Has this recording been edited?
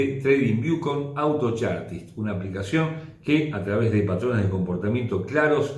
no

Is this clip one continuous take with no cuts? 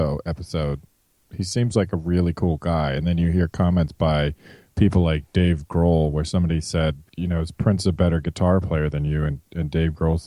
no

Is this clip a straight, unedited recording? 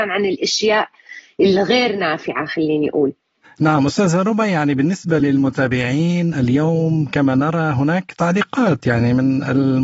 yes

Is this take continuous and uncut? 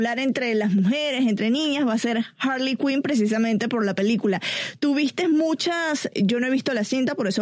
no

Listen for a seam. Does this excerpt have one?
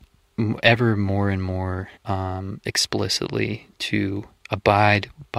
yes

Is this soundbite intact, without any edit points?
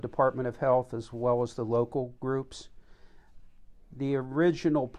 yes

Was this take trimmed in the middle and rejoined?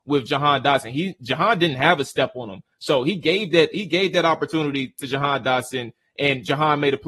no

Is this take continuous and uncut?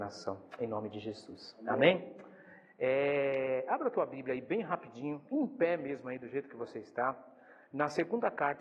yes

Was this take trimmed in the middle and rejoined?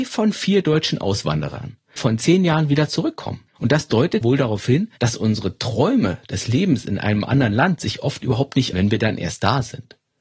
yes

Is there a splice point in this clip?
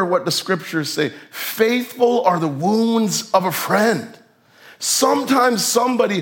no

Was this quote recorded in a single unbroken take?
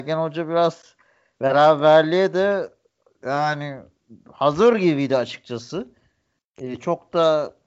yes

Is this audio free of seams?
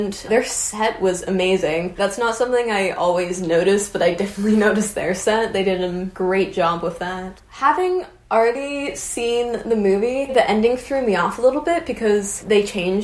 yes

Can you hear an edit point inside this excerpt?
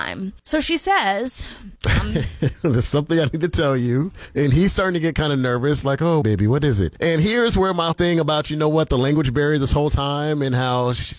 yes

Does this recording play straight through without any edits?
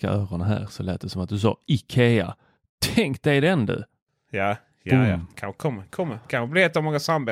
yes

